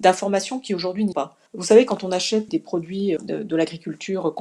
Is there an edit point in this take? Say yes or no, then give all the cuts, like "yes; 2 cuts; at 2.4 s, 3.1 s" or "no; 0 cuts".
yes; 4 cuts; at 1.1 s, 1.5 s, 2.5 s, 3.2 s